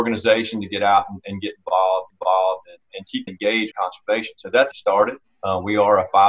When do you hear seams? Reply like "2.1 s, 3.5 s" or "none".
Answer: 2.1 s, 3.3 s, 3.7 s, 4.7 s, 5.2 s